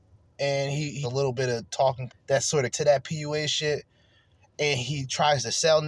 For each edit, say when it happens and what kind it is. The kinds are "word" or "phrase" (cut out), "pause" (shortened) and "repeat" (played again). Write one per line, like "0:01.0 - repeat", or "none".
0:01.0 - word
0:02.1 - word
0:02.7 - word